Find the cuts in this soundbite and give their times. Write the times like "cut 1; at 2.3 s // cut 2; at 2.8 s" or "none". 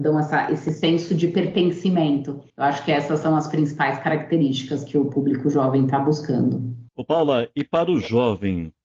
cut 1; at 2.5 s // cut 2; at 6.9 s